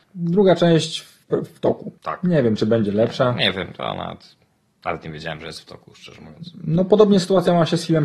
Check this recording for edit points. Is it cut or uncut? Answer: cut